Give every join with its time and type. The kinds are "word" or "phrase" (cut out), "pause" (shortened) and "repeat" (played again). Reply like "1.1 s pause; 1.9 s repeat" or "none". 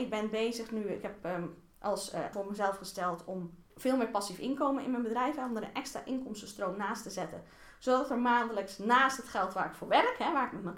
2.3 s word; 3.7 s pause